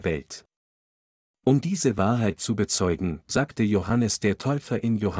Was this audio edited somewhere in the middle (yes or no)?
no